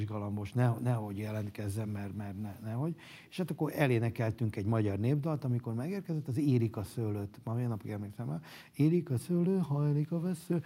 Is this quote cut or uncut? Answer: uncut